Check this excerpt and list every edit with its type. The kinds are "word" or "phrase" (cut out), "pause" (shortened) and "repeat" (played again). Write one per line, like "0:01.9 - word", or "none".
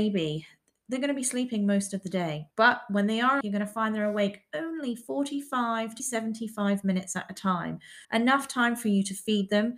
0:02.5 - pause
0:03.4 - word
0:06.0 - word
0:08.0 - pause